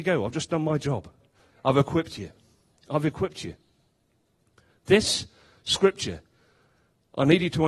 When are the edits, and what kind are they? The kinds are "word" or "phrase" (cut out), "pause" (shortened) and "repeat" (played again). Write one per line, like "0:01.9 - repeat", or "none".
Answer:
none